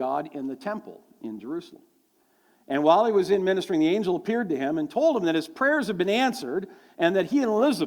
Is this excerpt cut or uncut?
uncut